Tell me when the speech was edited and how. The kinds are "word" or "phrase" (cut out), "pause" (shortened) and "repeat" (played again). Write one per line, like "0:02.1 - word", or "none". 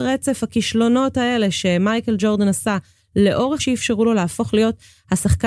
0:03.6 - phrase